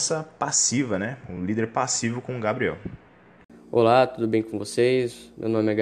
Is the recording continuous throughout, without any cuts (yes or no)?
yes